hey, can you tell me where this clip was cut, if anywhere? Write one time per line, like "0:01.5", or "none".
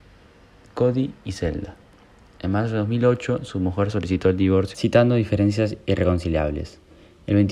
none